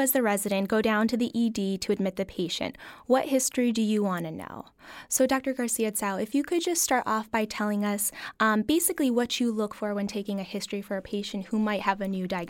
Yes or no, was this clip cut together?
no